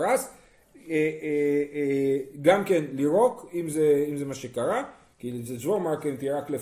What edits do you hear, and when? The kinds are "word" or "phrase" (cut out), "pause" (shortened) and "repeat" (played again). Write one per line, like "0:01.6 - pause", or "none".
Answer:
none